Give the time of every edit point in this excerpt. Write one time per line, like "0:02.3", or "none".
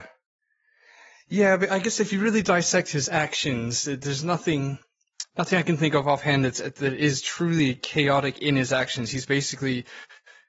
none

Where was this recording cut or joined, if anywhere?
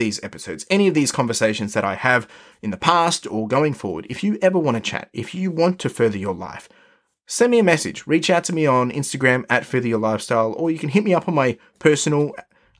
none

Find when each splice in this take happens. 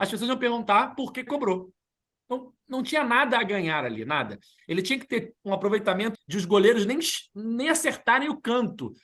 0:01.3
0:06.1

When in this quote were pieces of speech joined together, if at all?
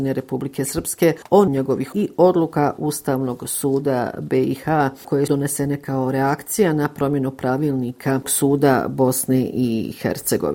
0:01.5
0:01.9
0:05.3
0:08.2

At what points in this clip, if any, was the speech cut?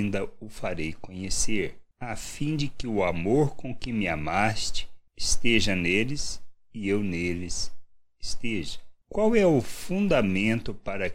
none

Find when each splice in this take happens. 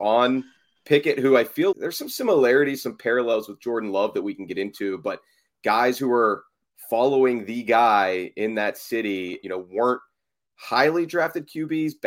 0:01.7
0:09.4

